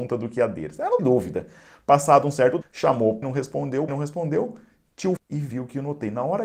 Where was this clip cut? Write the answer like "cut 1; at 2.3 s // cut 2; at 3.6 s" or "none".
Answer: cut 1; at 1.0 s // cut 2; at 2.6 s // cut 3; at 3.2 s // cut 4; at 3.9 s // cut 5; at 5.2 s